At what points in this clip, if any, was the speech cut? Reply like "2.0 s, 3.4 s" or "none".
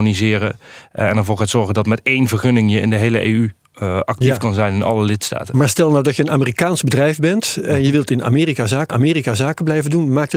8.9 s